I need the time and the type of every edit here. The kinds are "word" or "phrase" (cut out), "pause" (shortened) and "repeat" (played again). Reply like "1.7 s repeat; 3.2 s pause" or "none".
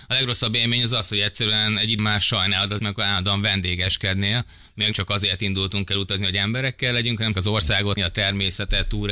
2.0 s word; 2.8 s word; 4.9 s word; 7.3 s word; 8.0 s word